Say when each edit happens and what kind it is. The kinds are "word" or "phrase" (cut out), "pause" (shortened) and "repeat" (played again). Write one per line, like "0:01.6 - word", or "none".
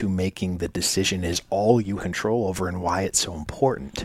0:02.0 - word